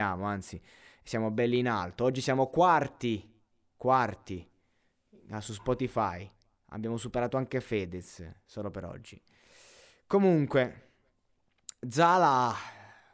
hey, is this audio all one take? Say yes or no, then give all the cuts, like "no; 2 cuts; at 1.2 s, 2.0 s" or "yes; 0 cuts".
yes; 0 cuts